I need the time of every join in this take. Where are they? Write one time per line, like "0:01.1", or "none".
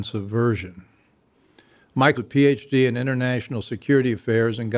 0:02.1

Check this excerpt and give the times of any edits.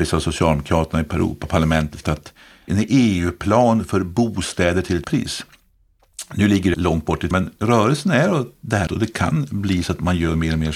0:02.0
0:02.7
0:05.0
0:06.7
0:07.3
0:08.9

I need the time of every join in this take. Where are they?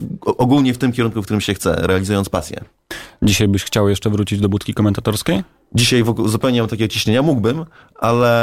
none

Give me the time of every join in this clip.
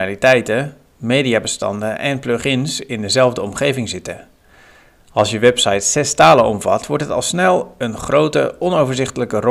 none

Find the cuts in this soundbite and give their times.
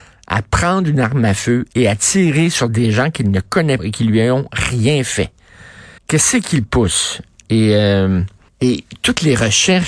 0:03.8
0:06.0
0:08.5

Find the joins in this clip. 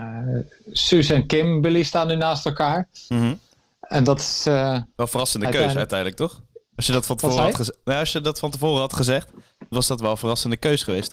none

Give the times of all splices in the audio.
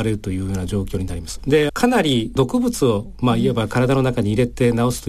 0:01.7

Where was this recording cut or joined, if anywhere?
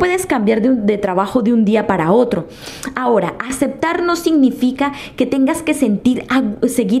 none

